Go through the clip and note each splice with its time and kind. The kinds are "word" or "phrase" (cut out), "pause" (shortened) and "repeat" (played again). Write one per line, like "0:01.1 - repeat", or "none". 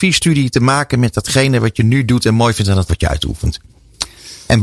0:02.9 - word